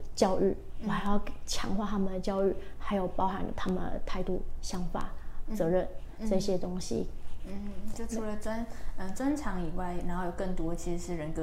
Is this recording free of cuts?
no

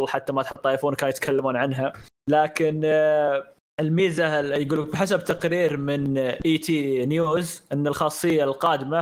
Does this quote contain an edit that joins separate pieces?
no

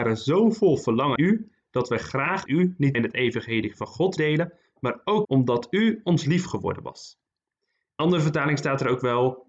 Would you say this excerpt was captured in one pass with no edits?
no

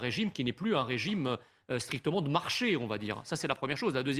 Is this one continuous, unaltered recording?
yes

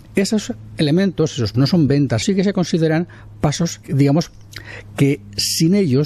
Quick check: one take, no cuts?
no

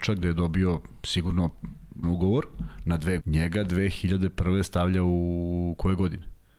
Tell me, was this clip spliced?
yes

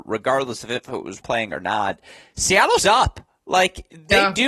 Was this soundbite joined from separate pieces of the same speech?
yes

